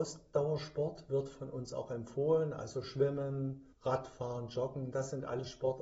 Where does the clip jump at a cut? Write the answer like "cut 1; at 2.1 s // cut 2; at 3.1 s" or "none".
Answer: cut 1; at 3.7 s